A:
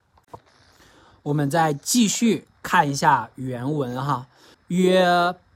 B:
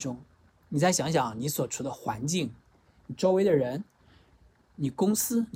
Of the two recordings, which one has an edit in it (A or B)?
A